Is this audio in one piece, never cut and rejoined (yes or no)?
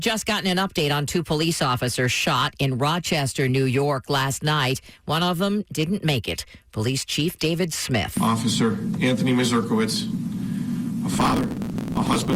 yes